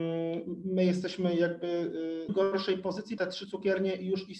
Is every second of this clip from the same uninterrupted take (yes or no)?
no